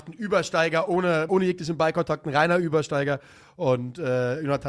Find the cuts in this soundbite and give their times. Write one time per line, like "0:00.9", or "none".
0:01.3